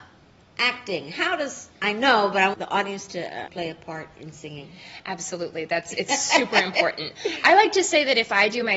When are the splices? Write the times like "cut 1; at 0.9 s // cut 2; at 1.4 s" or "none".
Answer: cut 1; at 1.8 s // cut 2; at 2.5 s // cut 3; at 3.5 s